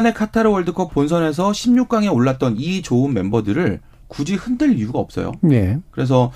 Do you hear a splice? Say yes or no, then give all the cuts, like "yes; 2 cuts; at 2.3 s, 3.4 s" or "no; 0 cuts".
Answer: no; 0 cuts